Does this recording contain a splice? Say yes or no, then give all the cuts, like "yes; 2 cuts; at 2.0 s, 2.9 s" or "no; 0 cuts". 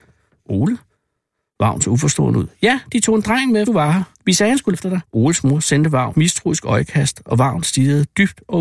yes; 5 cuts; at 3.7 s, 4.1 s, 4.7 s, 5.0 s, 6.1 s